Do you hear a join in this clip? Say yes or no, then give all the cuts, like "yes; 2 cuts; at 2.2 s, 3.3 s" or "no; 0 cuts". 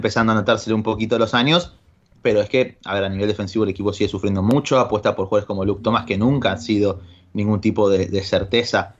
no; 0 cuts